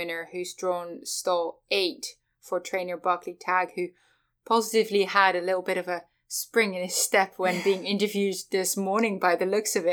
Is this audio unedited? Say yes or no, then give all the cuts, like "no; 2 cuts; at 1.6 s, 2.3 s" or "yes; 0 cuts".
yes; 0 cuts